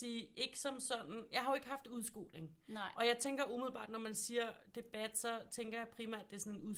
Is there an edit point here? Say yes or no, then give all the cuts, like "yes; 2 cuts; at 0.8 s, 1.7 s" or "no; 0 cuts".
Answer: no; 0 cuts